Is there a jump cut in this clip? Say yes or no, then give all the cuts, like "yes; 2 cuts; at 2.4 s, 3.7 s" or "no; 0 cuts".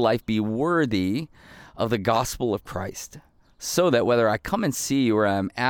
no; 0 cuts